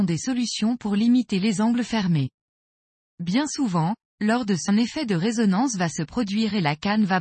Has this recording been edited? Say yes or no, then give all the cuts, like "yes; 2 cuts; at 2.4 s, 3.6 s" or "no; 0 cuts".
yes; 1 cut; at 4.7 s